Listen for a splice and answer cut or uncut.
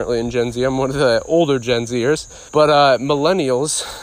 cut